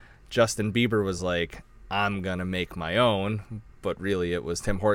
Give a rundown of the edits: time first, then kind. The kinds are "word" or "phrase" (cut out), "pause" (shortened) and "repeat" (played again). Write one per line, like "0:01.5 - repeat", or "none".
none